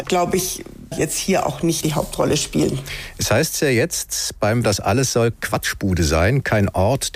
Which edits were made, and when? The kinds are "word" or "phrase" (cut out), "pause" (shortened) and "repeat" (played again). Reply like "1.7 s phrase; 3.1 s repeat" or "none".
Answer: 0.9 s phrase; 1.8 s word; 4.6 s word; 5.3 s word